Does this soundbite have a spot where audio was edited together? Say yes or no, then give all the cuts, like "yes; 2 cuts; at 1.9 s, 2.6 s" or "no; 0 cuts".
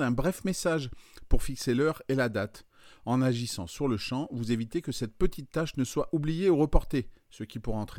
no; 0 cuts